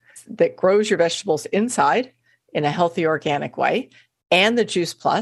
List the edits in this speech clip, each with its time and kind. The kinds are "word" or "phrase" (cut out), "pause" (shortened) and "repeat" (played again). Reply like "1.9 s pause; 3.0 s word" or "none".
none